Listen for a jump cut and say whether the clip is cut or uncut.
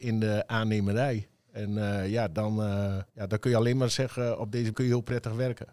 cut